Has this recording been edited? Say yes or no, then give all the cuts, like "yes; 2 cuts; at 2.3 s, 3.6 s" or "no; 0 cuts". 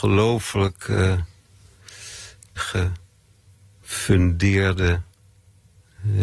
yes; 1 cut; at 2.6 s